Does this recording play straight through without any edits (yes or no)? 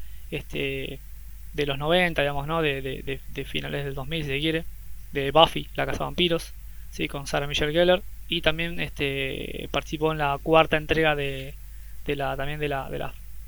yes